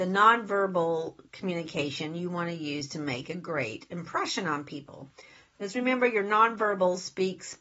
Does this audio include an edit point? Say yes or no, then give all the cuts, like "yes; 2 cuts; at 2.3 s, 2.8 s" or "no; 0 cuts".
no; 0 cuts